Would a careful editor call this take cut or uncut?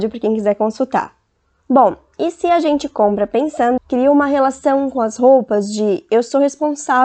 cut